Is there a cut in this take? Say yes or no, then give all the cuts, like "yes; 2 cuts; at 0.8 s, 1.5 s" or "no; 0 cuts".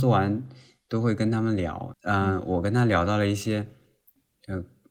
no; 0 cuts